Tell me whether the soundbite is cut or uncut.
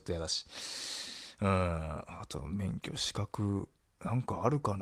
uncut